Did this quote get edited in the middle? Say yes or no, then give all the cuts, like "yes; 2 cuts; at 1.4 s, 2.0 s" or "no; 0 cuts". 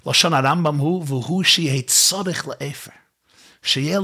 no; 0 cuts